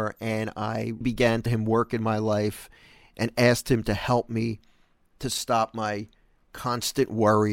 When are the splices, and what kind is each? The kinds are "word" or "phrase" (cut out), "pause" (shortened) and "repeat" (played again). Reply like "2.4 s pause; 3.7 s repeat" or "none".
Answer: 1.0 s word; 1.5 s word